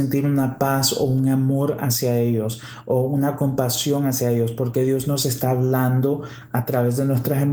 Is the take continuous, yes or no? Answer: yes